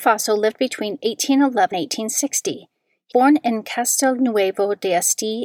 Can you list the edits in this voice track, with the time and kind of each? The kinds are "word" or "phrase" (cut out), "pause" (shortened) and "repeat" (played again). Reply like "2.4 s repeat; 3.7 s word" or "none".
1.7 s word; 3.1 s word